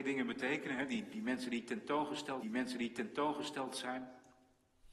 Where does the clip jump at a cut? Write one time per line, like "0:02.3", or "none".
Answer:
0:02.4